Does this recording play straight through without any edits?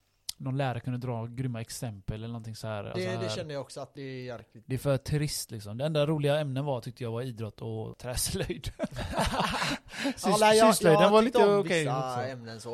no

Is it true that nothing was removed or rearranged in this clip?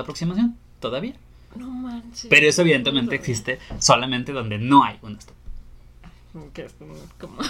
yes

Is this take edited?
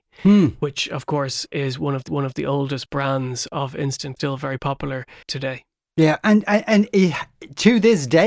yes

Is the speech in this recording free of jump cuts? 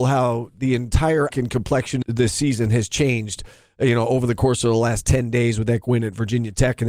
no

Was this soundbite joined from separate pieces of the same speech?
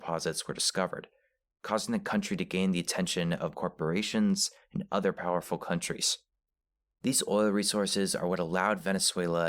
yes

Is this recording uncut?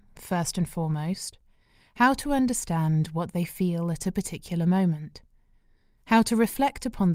yes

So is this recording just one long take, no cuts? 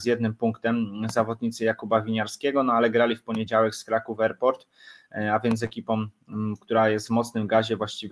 yes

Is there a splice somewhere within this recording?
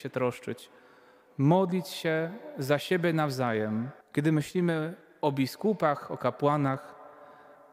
yes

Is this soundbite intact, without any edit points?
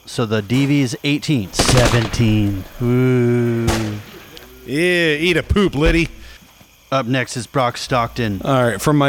yes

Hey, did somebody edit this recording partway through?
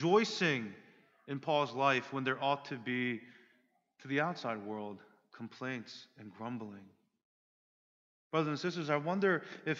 no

